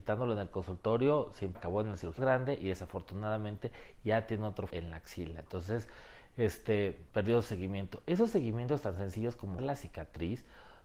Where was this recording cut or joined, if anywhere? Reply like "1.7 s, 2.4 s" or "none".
1.5 s, 2.2 s, 4.7 s, 7.1 s, 9.6 s

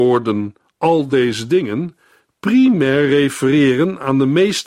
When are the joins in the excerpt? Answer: none

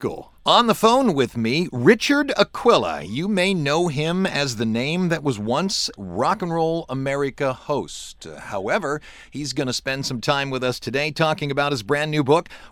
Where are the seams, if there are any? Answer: 6.0 s

